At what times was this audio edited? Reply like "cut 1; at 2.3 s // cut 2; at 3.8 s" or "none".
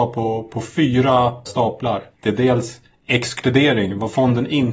cut 1; at 1.5 s // cut 2; at 2.1 s